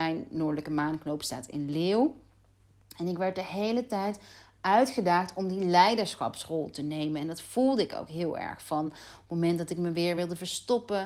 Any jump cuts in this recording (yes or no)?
no